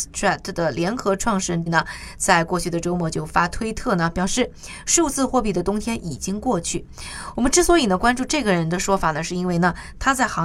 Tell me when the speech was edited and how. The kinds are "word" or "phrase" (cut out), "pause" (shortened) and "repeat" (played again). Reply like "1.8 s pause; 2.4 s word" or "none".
1.7 s phrase